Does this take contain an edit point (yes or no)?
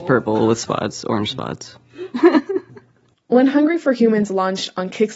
no